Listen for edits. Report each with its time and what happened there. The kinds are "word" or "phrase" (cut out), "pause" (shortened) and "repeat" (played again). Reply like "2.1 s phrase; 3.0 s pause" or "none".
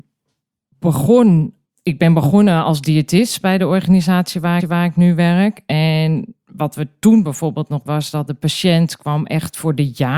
4.6 s repeat; 7.9 s word